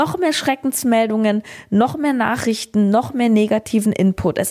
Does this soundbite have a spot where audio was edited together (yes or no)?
no